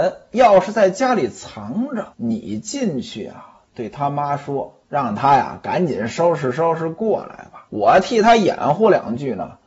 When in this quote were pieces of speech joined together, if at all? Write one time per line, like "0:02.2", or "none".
0:02.1
0:04.8
0:07.7